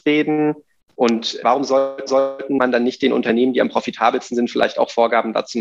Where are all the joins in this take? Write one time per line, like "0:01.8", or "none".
0:01.4
0:02.1